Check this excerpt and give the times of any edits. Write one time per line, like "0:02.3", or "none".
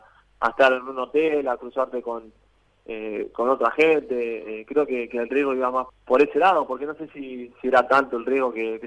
0:05.9

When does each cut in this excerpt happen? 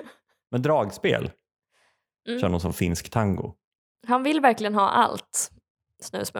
0:03.7

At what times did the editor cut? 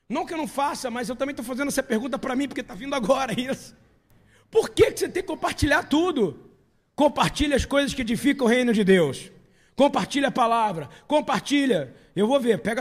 none

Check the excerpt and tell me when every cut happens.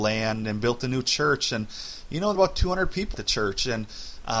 0:02.3
0:03.1

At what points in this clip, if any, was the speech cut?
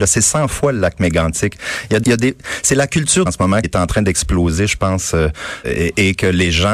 0:02.0
0:03.3
0:03.6
0:05.6

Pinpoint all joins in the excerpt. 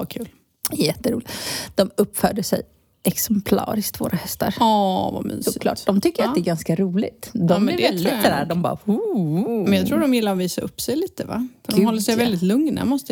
none

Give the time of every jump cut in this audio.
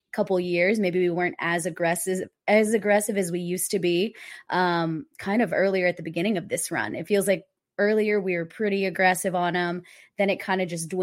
none

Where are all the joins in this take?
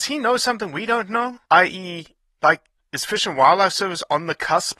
0:01.5
0:02.8

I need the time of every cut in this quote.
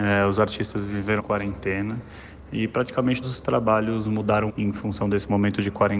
0:01.2
0:03.2
0:04.5

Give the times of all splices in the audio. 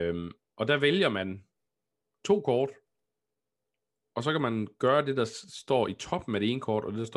none

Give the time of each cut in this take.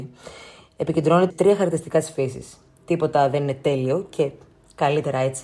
0:01.3

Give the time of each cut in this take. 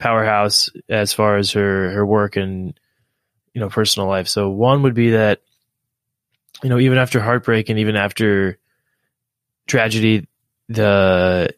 none

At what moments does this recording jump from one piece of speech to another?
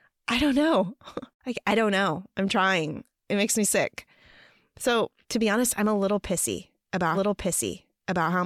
0:01.3
0:05.2
0:07.1

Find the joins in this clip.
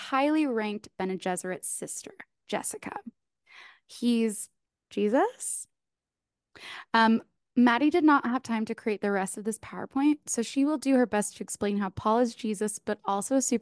0:04.7

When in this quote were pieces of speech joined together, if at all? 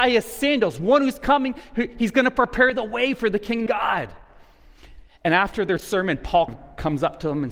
0:03.7
0:06.5

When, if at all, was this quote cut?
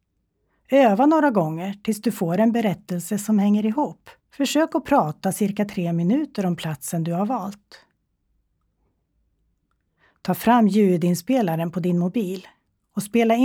0:04.2

